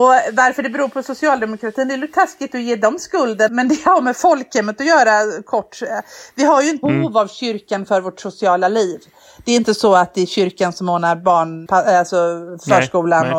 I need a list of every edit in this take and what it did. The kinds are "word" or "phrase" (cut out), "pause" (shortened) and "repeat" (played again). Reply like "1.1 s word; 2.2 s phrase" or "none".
3.5 s word; 6.8 s word; 11.7 s word